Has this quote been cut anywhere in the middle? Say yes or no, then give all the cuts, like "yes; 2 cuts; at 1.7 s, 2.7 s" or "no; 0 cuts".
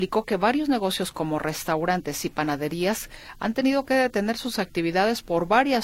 no; 0 cuts